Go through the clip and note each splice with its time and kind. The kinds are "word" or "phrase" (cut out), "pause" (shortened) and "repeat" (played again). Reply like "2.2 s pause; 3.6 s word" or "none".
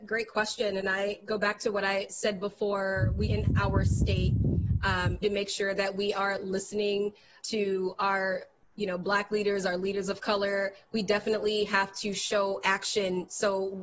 3.3 s word; 5.2 s word; 7.4 s word